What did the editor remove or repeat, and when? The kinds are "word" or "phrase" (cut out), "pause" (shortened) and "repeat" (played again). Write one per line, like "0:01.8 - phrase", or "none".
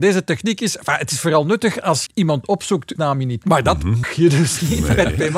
0:02.1 - word
0:03.0 - word
0:03.4 - word
0:04.0 - word